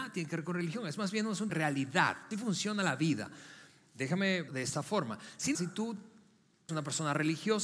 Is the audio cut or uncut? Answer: cut